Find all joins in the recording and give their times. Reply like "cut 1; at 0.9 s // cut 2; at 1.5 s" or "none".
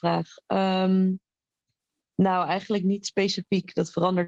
none